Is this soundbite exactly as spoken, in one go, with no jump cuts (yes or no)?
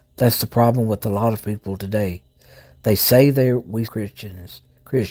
no